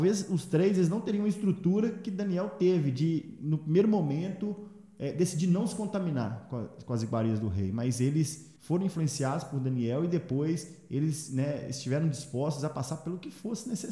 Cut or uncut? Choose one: cut